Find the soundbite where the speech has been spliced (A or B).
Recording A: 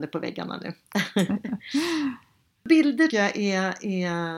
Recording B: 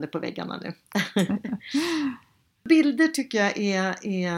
A